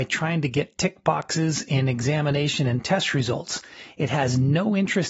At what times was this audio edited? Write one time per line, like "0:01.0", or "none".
none